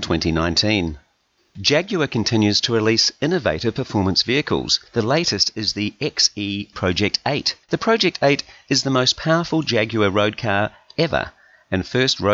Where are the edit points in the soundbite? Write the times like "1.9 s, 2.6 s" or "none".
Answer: 1.4 s, 4.9 s, 6.7 s, 7.6 s